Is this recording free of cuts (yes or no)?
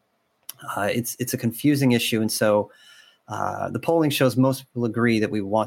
yes